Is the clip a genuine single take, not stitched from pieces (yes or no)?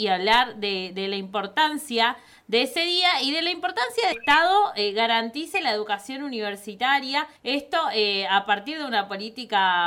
no